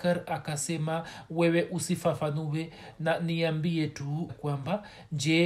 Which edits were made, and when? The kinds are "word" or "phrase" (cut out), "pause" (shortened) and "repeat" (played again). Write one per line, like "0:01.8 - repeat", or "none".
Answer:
0:04.3 - word

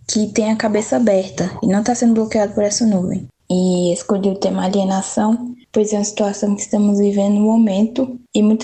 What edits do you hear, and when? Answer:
none

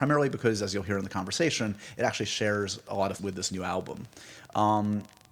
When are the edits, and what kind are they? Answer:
0:03.2 - word

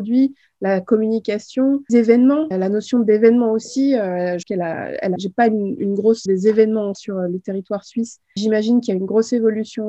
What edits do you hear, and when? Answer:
0:01.9 - word
0:02.5 - word
0:04.4 - word
0:05.2 - word
0:05.8 - word
0:06.3 - word
0:06.9 - word
0:08.4 - word

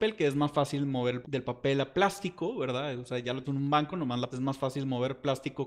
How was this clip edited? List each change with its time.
0:01.2 - word
0:01.9 - word
0:03.4 - word
0:04.3 - word

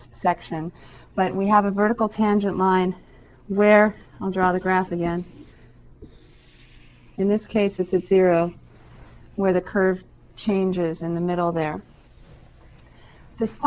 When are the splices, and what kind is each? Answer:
none

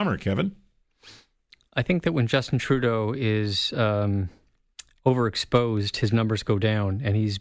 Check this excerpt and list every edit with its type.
none

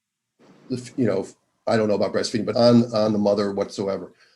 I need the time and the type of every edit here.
0:02.5 - word

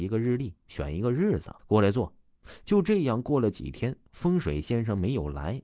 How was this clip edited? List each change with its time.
0:01.6 - pause

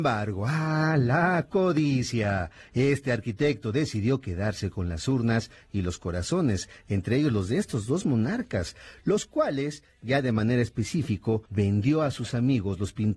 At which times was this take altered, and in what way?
0:11.5 - pause

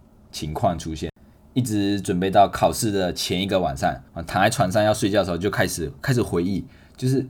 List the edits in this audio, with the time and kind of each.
0:04.1 - pause

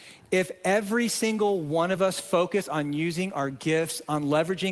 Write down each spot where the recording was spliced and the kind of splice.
none

